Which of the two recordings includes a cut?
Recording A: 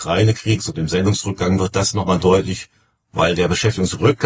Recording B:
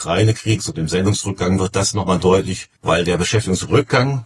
B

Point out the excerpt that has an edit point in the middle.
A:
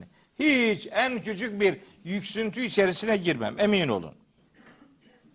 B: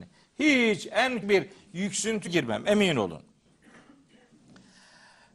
B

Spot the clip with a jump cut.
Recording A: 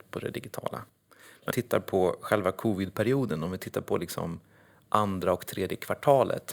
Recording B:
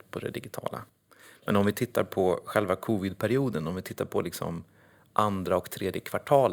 A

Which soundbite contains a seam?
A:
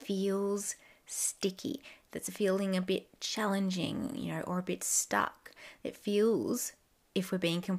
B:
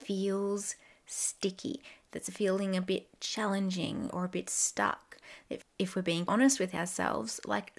B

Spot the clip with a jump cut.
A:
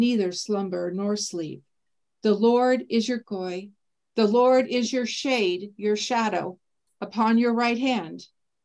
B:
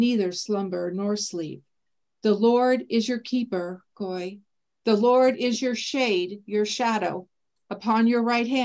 A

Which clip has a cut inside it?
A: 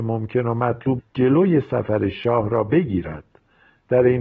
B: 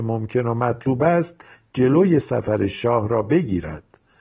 A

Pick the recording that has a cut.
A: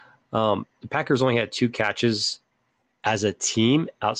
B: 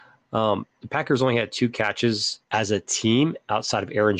B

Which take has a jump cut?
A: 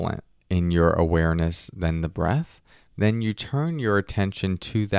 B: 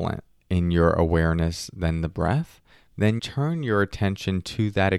B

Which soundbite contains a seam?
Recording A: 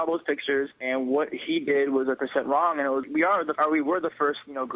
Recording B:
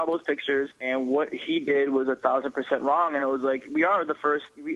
A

